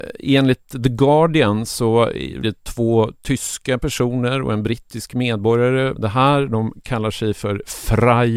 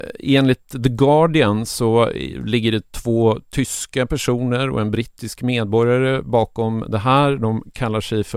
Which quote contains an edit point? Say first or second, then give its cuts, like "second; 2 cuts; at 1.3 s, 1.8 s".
first; 2 cuts; at 2.4 s, 6.0 s